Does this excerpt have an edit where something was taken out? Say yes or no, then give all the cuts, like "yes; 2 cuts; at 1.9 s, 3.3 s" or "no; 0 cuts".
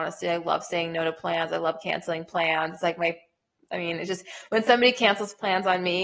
no; 0 cuts